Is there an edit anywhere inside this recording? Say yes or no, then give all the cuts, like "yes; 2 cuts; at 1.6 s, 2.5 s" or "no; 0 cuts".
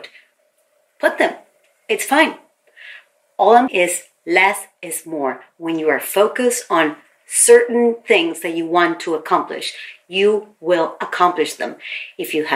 yes; 1 cut; at 3.7 s